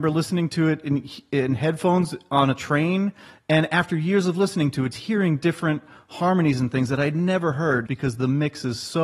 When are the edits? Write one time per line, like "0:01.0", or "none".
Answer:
0:04.9
0:07.9